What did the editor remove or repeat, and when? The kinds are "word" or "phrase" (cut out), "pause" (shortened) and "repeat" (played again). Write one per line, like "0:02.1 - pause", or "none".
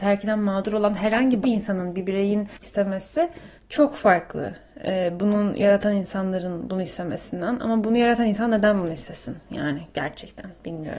0:01.4 - word
0:02.6 - word
0:03.6 - pause